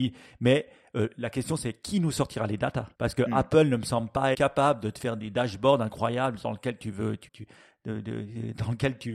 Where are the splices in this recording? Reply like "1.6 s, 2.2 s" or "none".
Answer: 2.9 s, 4.3 s, 7.3 s